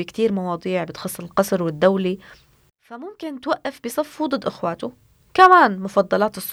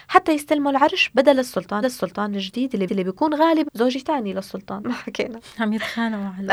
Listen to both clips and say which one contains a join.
second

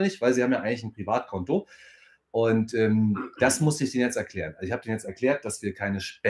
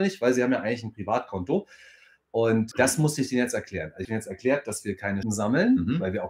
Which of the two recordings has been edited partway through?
second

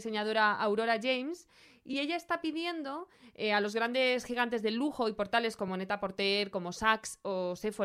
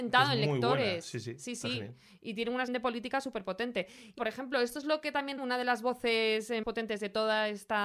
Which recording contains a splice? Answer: second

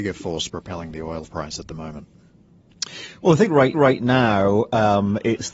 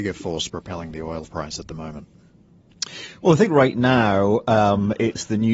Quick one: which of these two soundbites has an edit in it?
first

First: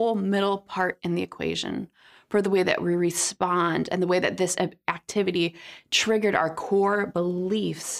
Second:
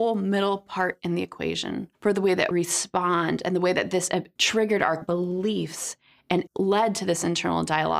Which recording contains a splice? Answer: second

